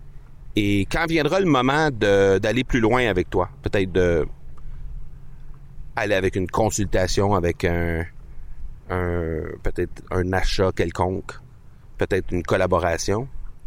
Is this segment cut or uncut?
uncut